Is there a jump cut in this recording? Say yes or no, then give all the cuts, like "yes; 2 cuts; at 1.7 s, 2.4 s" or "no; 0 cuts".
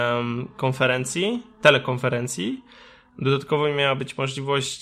no; 0 cuts